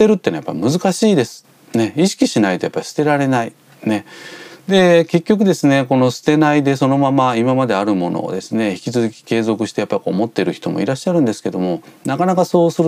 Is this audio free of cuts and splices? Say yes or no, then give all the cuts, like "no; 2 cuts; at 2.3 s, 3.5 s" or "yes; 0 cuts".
yes; 0 cuts